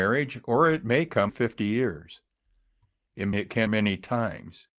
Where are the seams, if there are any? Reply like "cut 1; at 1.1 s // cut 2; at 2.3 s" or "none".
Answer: cut 1; at 1.3 s // cut 2; at 3.3 s // cut 3; at 3.7 s